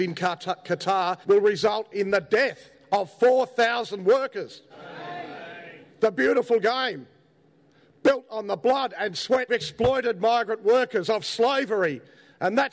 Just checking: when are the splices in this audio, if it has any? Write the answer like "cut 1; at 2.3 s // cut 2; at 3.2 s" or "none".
cut 1; at 1.2 s // cut 2; at 4.7 s // cut 3; at 9.5 s